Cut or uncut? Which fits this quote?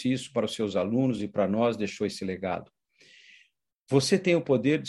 uncut